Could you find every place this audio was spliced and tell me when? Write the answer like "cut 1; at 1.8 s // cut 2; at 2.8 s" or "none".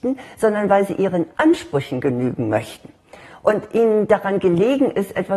cut 1; at 1.3 s